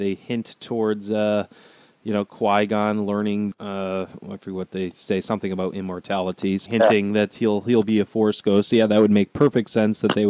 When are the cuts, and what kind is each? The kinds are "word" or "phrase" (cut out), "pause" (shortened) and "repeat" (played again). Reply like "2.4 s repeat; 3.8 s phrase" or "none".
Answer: 3.5 s word; 6.7 s word